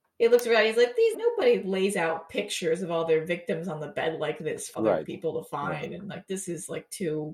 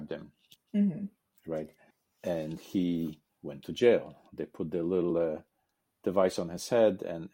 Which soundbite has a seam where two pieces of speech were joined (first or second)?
first